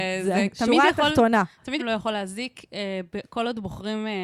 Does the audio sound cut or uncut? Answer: cut